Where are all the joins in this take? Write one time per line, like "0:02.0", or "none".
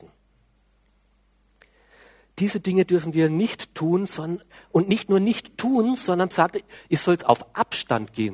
0:06.3